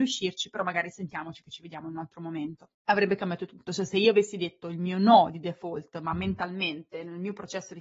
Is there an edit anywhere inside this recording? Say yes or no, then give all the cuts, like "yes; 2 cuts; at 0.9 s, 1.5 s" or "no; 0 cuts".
yes; 1 cut; at 2.7 s